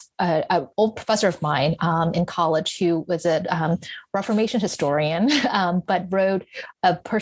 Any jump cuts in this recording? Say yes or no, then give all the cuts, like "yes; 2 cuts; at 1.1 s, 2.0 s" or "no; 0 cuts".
no; 0 cuts